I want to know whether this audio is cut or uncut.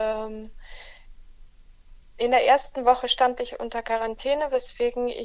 uncut